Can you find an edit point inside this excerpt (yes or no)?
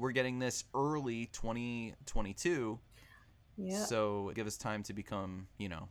yes